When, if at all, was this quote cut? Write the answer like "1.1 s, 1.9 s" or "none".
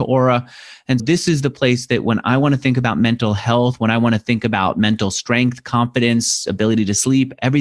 1.0 s